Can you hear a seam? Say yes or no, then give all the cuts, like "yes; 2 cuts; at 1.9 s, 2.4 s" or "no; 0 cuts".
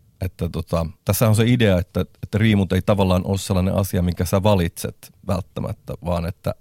yes; 1 cut; at 1.0 s